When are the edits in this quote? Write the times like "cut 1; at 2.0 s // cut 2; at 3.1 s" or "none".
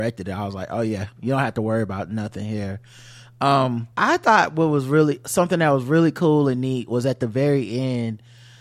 cut 1; at 3.9 s